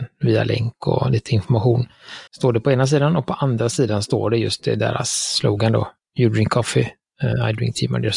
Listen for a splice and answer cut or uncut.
cut